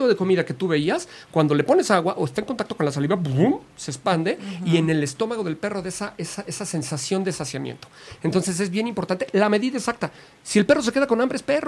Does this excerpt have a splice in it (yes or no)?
no